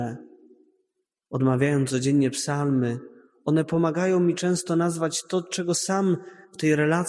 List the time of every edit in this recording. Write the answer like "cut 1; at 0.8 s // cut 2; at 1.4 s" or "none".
none